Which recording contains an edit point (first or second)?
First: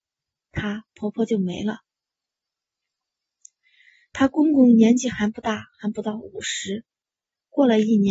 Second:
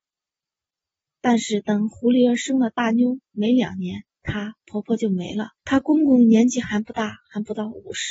second